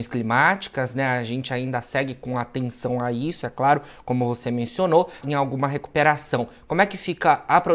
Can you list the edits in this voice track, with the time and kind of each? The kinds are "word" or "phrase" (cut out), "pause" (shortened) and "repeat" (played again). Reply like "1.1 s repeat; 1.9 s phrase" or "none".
5.2 s phrase